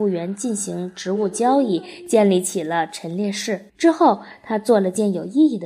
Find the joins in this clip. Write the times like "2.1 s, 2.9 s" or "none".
3.7 s